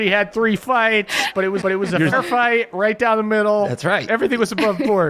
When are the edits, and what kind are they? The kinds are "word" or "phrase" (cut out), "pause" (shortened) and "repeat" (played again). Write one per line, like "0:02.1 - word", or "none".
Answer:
0:01.6 - repeat
0:02.1 - word